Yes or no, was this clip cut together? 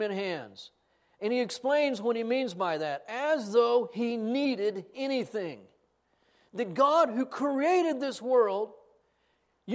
no